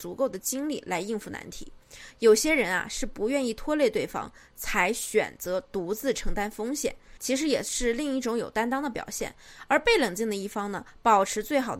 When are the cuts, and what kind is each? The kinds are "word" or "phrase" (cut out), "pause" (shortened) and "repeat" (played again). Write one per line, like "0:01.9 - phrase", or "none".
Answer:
none